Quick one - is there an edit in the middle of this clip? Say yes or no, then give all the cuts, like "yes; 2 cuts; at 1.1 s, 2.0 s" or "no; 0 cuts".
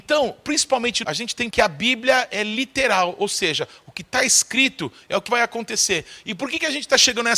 yes; 3 cuts; at 1.0 s, 1.5 s, 5.3 s